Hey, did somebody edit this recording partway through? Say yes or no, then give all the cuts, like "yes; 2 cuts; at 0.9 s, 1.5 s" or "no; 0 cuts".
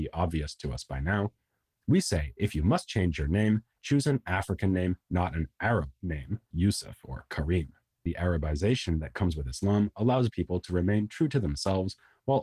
yes; 3 cuts; at 6.5 s, 8.1 s, 10.3 s